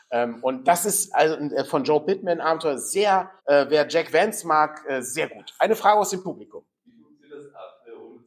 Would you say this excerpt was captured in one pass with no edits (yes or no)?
no